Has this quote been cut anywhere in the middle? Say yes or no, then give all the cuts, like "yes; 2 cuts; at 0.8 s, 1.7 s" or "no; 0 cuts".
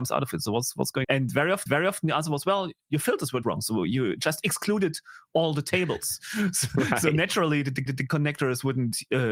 yes; 4 cuts; at 1.0 s, 1.7 s, 3.4 s, 7.9 s